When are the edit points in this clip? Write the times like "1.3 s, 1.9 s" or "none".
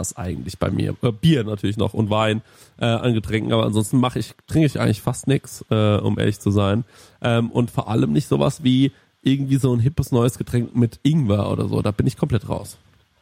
none